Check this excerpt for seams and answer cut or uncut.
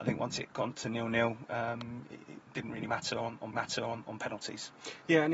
cut